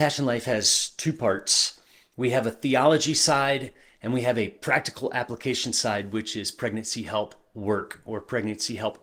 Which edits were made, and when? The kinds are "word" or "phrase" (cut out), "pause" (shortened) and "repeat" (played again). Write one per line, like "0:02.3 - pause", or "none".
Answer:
none